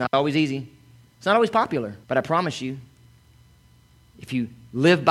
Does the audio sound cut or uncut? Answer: cut